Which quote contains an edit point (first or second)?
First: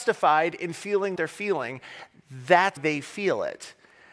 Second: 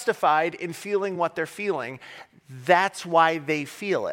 first